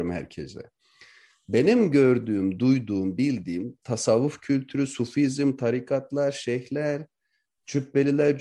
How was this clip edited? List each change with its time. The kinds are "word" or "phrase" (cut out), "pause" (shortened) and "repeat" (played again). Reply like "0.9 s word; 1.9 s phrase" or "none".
none